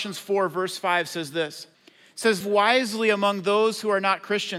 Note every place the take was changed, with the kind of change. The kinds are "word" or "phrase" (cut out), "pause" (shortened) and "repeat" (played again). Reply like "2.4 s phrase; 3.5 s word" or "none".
1.7 s pause; 2.4 s word